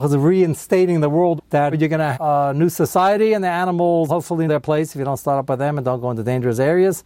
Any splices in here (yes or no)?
yes